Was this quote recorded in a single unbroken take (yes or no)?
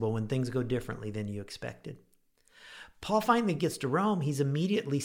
yes